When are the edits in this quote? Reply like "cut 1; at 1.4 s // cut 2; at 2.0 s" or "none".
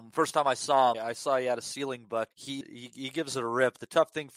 cut 1; at 0.9 s // cut 2; at 2.3 s // cut 3; at 2.6 s